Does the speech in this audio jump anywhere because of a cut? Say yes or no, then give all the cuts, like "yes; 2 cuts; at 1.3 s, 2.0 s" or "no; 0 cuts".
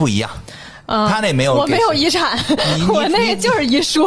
no; 0 cuts